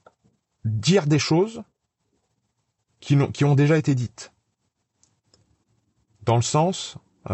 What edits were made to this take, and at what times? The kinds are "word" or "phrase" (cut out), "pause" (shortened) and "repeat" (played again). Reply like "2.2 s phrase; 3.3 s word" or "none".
none